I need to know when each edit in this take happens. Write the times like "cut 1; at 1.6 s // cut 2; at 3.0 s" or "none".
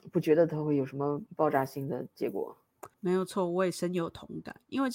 cut 1; at 1.3 s // cut 2; at 2.9 s